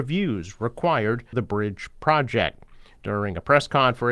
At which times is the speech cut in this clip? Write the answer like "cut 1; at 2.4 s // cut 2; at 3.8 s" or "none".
cut 1; at 1.3 s